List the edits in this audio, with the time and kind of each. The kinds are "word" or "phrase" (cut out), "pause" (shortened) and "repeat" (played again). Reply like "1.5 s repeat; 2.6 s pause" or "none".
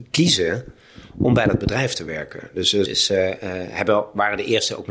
2.9 s word